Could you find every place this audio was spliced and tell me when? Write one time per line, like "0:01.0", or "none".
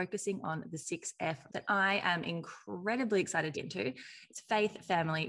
0:01.5
0:03.5